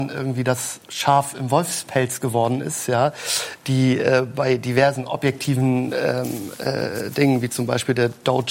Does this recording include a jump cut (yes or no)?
no